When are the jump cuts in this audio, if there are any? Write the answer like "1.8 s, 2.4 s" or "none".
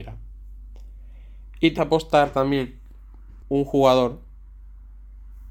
1.8 s, 3.4 s